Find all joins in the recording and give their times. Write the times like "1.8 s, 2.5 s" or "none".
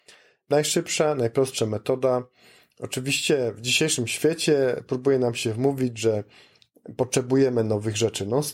none